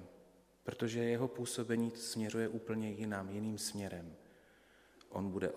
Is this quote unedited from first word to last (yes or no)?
yes